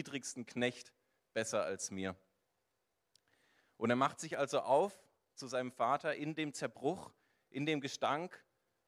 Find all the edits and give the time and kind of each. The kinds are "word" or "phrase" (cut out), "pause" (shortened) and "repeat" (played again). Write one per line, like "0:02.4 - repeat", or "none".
none